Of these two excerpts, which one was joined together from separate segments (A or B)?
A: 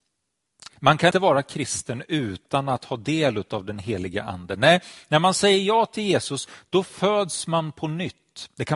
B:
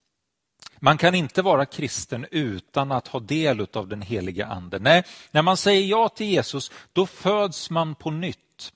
A